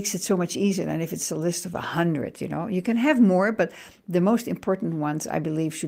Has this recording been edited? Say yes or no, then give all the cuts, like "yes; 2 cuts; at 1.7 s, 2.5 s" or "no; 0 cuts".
no; 0 cuts